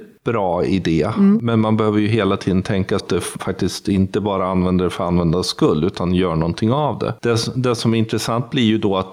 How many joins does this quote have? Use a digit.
2